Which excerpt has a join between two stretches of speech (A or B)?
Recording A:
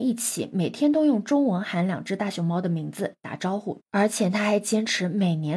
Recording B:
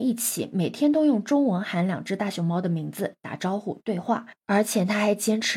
A